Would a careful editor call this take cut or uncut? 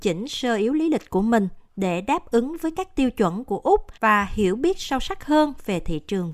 cut